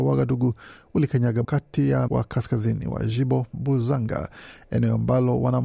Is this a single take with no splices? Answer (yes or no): no